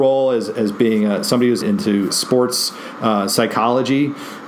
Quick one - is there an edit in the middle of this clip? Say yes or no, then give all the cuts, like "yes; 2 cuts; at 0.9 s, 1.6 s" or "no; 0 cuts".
yes; 2 cuts; at 1.6 s, 2.1 s